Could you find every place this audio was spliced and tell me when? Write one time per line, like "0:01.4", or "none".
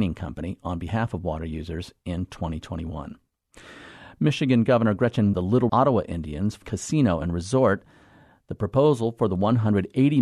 0:05.3
0:05.7
0:06.6